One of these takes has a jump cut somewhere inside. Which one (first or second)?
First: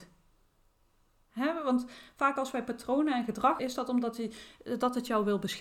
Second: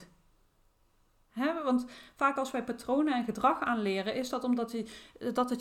first